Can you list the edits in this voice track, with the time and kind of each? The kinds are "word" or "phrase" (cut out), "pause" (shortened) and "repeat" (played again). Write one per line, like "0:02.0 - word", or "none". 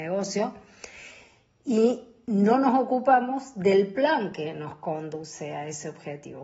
none